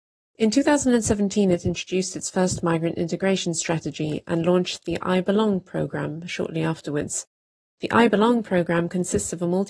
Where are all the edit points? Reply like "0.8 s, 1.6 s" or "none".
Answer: none